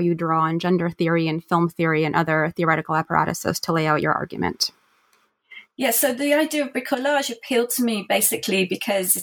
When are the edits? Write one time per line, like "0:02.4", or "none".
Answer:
none